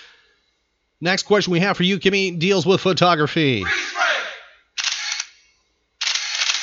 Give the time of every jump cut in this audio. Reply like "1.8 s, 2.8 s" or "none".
none

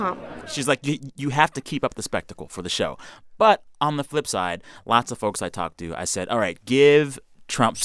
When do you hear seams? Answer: none

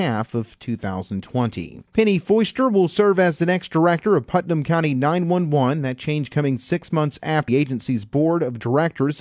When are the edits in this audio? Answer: 1.9 s, 7.5 s

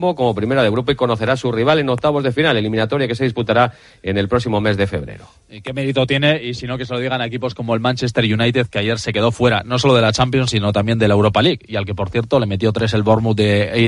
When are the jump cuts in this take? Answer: none

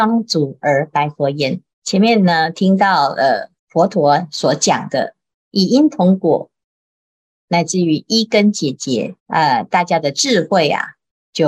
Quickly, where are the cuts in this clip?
1.7 s, 3.6 s, 9.2 s

